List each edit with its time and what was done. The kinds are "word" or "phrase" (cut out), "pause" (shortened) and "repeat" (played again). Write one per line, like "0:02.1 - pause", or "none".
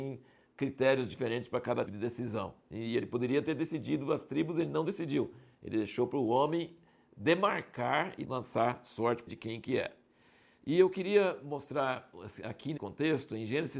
0:01.9 - word
0:08.2 - word
0:09.3 - word
0:12.8 - word